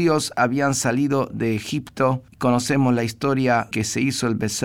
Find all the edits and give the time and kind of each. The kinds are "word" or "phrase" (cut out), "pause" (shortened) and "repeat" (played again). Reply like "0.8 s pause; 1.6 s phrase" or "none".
2.3 s pause; 3.7 s word